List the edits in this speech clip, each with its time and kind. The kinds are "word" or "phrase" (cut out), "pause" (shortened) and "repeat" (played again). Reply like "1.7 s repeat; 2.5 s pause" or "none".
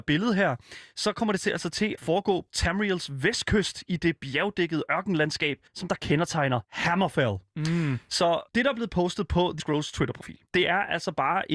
2.0 s word; 2.5 s word; 5.7 s pause; 6.6 s pause; 8.5 s pause; 9.6 s word; 10.5 s pause

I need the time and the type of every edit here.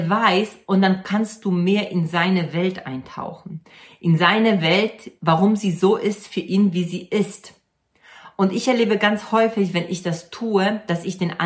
none

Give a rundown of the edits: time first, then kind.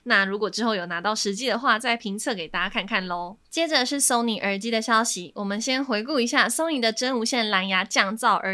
3.4 s pause

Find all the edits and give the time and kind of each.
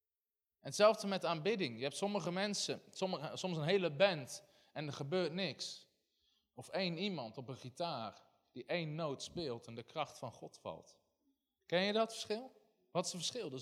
none

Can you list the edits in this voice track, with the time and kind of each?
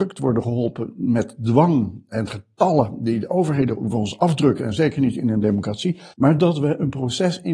6.1 s pause

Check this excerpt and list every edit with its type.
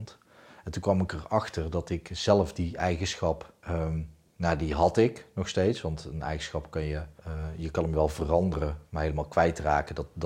3.6 s pause; 7.2 s pause

